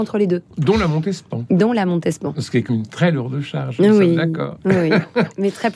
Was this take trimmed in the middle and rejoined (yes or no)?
yes